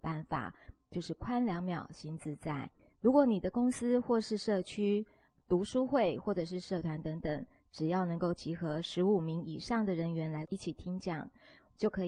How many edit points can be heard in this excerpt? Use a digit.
1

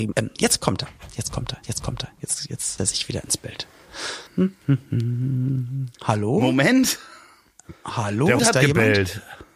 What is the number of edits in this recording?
5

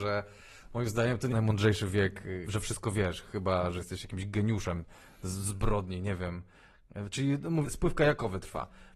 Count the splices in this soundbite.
3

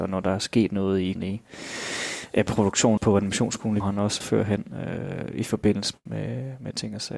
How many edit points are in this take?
5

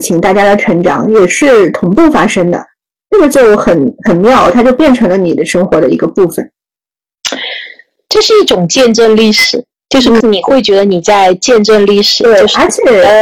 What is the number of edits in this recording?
1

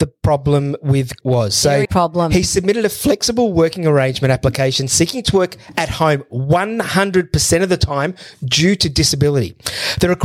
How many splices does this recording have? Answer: 2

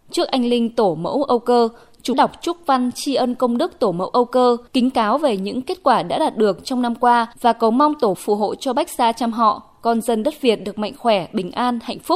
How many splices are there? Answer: 4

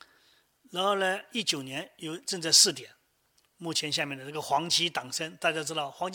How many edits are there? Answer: 0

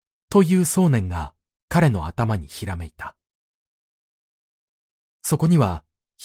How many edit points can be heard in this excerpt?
0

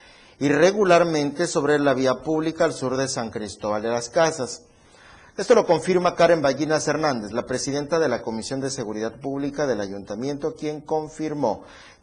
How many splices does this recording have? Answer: 0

